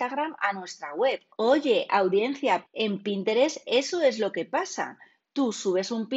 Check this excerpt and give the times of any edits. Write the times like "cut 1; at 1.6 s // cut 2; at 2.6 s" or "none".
cut 1; at 1.3 s // cut 2; at 2.6 s